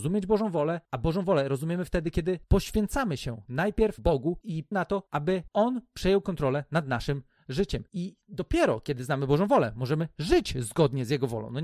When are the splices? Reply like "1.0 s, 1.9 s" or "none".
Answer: 4.7 s